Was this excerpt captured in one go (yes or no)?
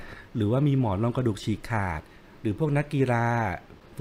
yes